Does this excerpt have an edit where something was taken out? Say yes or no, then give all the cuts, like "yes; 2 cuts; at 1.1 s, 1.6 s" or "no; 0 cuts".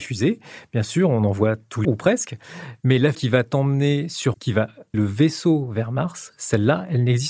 yes; 4 cuts; at 1.8 s, 3.1 s, 4.3 s, 4.9 s